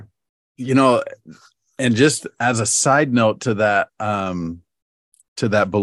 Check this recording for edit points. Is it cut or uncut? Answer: uncut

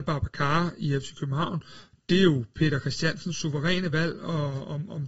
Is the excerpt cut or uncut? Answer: uncut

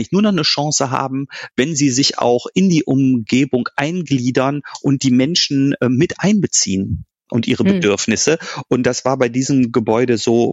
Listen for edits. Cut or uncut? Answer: uncut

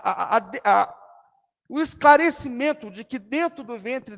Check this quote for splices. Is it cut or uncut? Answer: uncut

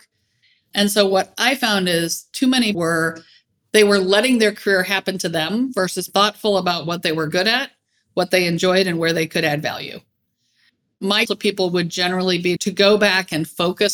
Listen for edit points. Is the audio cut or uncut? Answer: cut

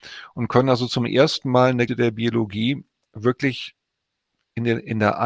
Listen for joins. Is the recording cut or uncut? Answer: cut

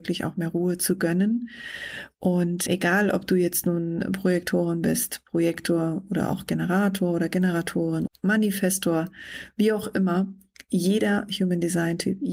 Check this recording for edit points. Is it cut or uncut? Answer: cut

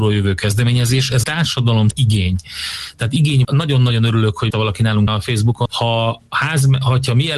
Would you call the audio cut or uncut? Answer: cut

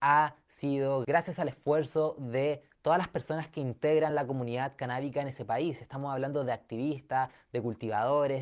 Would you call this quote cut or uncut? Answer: uncut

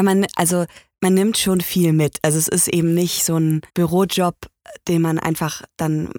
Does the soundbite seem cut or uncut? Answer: cut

